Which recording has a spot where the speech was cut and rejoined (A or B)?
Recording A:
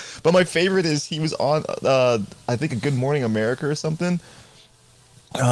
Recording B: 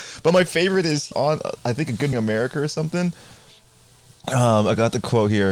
B